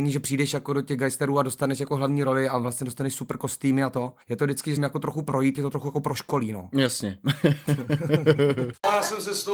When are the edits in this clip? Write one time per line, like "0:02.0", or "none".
0:04.2
0:04.8
0:05.6